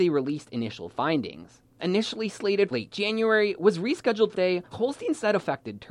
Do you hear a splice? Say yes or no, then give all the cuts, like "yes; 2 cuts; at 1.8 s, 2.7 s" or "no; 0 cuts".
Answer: yes; 4 cuts; at 1.8 s, 2.7 s, 4.3 s, 4.7 s